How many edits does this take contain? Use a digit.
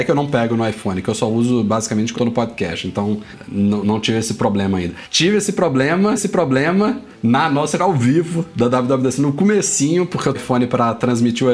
5